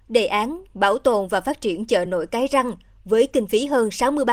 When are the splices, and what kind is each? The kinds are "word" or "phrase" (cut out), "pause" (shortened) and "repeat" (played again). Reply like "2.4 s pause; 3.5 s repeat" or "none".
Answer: none